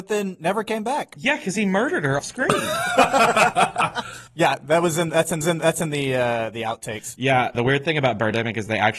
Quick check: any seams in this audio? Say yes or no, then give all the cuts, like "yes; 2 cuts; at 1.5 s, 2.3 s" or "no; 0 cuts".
yes; 4 cuts; at 2.2 s, 4.3 s, 5.4 s, 7.5 s